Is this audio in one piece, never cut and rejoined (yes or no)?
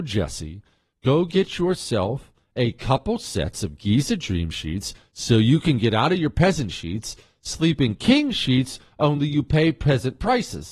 yes